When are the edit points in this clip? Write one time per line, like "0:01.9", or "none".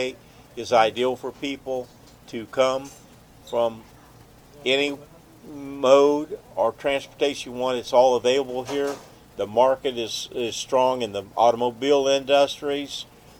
none